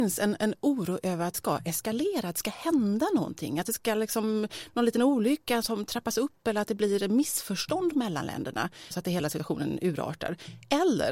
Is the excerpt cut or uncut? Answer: cut